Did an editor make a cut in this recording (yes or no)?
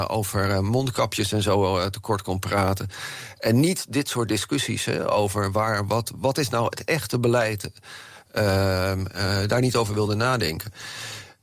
no